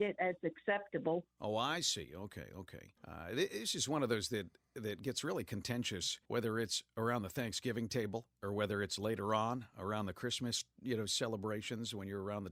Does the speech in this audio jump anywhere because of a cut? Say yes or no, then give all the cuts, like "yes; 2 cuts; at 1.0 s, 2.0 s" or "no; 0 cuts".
yes; 2 cuts; at 3.0 s, 6.3 s